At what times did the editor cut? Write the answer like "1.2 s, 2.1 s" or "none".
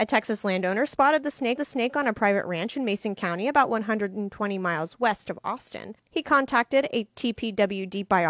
1.6 s